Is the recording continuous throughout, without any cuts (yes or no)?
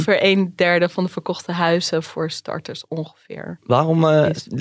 yes